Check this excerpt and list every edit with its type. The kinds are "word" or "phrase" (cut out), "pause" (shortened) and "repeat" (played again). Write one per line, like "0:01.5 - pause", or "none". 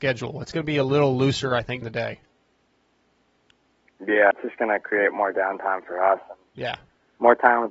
0:01.8 - word
0:04.3 - word